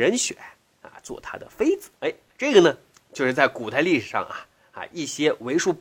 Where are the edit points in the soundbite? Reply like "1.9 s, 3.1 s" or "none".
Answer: 2.0 s